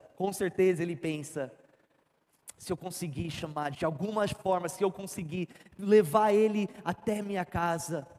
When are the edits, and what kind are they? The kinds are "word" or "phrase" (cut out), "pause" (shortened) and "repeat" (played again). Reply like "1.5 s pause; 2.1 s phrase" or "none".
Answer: 3.7 s word